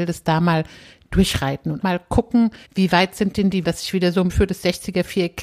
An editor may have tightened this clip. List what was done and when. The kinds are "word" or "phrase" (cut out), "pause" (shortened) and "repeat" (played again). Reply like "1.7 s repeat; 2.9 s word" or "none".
1.8 s word; 2.6 s pause; 3.6 s word; 4.3 s phrase